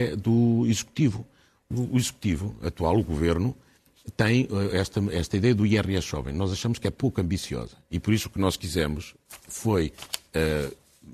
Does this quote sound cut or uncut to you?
uncut